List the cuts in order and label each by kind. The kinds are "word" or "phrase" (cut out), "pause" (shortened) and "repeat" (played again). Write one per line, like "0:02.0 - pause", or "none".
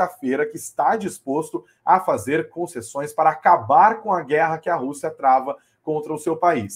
none